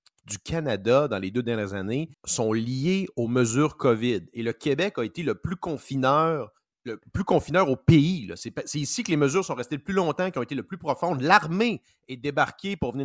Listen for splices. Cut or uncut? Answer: cut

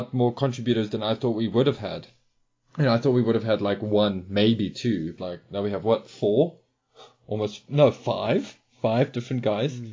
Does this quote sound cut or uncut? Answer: cut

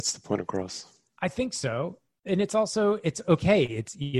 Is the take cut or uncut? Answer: uncut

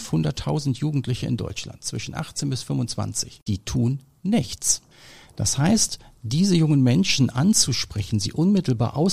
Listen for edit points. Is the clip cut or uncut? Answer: uncut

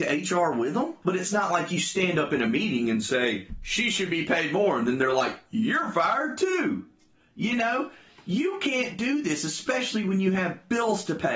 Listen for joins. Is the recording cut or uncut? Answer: uncut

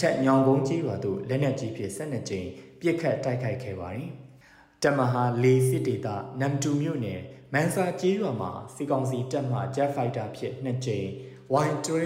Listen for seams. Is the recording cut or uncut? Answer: uncut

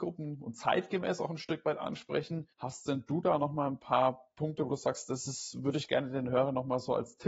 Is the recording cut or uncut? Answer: cut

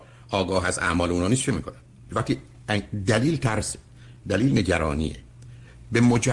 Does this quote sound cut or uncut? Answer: uncut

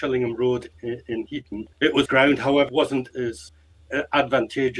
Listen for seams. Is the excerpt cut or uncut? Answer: cut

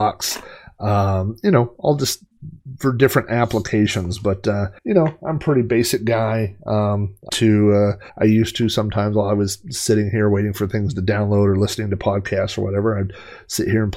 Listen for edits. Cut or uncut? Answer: cut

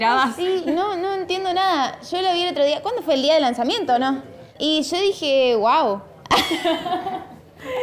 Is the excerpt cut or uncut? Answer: cut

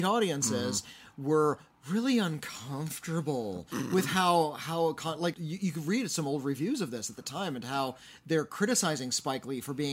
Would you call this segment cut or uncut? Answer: cut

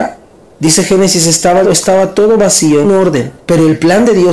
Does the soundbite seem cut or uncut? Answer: cut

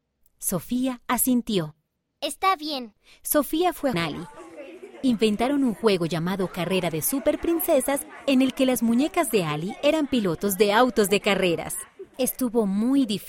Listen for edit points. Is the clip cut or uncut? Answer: cut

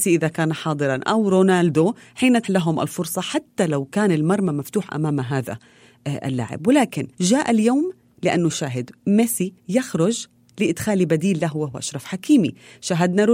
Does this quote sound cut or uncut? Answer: cut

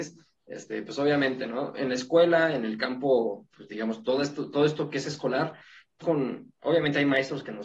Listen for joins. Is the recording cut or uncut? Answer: cut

